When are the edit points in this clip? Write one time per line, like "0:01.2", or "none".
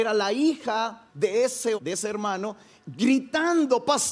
0:01.1
0:01.8